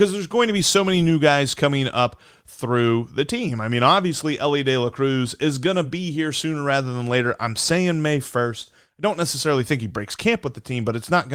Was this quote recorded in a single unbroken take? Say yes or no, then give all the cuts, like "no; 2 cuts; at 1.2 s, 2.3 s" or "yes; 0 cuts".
yes; 0 cuts